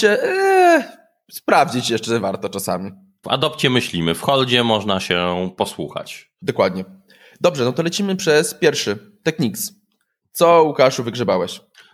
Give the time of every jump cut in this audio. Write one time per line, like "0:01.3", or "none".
0:03.2